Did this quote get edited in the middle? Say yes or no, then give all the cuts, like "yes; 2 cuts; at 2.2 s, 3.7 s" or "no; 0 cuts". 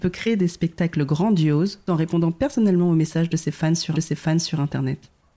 yes; 2 cuts; at 1.9 s, 3.9 s